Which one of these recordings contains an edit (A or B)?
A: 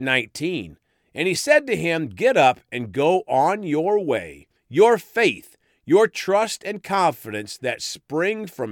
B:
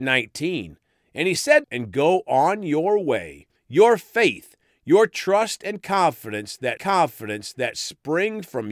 B